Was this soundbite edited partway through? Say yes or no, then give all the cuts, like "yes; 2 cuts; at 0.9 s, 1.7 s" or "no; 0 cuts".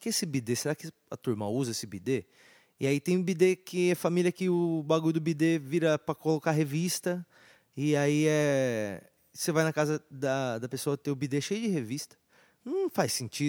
no; 0 cuts